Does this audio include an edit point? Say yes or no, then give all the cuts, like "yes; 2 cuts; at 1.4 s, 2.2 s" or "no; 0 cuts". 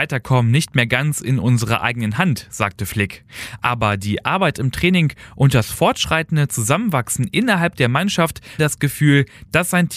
yes; 1 cut; at 8.6 s